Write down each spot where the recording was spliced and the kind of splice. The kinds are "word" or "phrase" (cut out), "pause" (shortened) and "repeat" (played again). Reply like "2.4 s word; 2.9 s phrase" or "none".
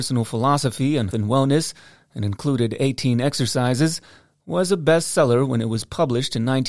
1.1 s word